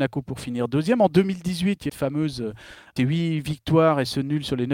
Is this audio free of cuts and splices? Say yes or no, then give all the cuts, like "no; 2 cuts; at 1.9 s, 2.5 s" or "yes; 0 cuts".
no; 2 cuts; at 1.9 s, 3.0 s